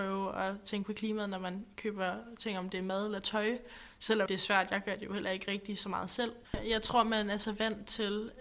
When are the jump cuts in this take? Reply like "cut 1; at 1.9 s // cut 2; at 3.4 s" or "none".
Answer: cut 1; at 4.3 s // cut 2; at 6.4 s